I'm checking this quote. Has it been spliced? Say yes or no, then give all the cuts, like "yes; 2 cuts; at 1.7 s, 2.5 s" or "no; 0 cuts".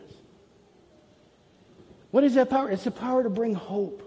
no; 0 cuts